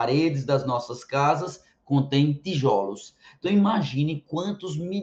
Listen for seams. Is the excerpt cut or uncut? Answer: uncut